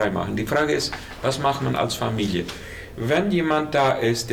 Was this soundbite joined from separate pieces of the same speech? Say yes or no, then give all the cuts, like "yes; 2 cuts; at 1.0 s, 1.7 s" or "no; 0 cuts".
no; 0 cuts